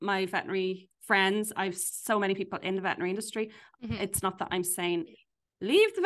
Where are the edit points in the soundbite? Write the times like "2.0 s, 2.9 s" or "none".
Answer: none